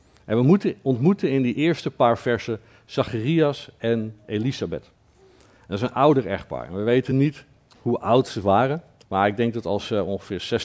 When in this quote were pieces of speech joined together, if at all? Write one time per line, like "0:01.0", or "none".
none